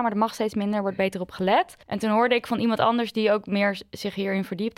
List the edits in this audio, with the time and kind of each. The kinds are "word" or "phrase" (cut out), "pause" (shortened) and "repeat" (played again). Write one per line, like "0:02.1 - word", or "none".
0:01.8 - pause